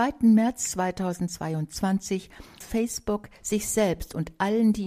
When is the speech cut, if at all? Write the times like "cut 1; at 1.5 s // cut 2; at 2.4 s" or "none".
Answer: cut 1; at 2.6 s